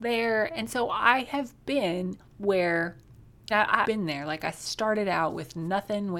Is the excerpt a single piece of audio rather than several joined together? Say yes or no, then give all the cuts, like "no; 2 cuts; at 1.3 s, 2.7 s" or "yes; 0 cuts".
no; 3 cuts; at 2.3 s, 3.5 s, 3.8 s